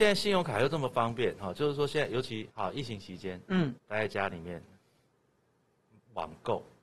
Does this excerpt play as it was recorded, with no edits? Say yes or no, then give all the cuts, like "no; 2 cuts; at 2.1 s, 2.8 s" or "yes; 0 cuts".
no; 2 cuts; at 2.5 s, 3.8 s